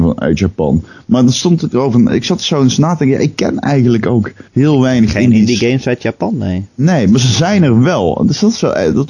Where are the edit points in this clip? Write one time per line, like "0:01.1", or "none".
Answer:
0:04.5